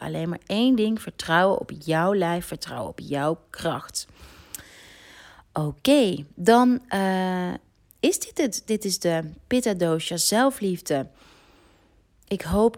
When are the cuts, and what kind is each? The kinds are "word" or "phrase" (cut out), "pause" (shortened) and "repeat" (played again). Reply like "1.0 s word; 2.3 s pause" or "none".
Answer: none

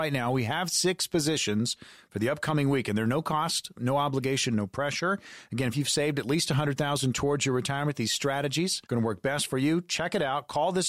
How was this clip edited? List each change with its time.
8.9 s pause

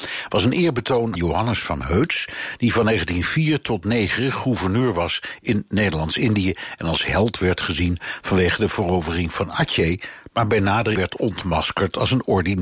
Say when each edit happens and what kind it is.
1.2 s word; 11.0 s word

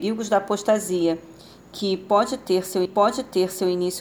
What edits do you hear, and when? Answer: 2.8 s repeat

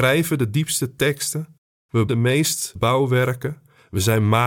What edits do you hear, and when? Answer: 2.1 s word; 2.8 s word

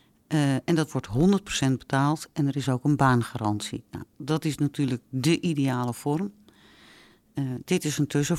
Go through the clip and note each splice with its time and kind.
none

